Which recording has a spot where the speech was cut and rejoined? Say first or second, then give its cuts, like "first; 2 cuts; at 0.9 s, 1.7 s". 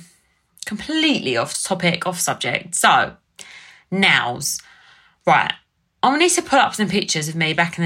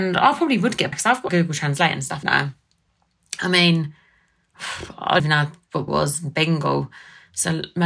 second; 5 cuts; at 0.9 s, 1.3 s, 2.2 s, 5.2 s, 5.9 s